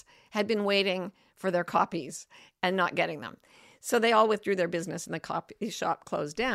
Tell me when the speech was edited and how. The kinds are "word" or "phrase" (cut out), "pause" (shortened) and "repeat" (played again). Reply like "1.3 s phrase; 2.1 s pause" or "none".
none